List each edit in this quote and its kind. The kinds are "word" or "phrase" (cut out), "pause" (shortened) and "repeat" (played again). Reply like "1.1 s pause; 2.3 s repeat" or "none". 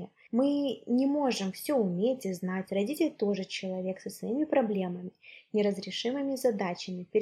none